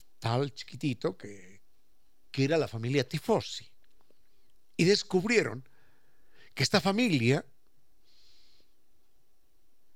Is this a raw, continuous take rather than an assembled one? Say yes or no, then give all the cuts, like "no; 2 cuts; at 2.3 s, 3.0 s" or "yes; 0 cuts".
yes; 0 cuts